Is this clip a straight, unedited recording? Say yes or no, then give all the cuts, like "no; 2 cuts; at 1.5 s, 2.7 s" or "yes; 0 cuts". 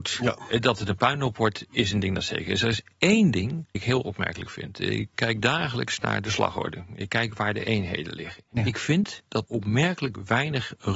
no; 4 cuts; at 1.7 s, 3.7 s, 5.1 s, 9.5 s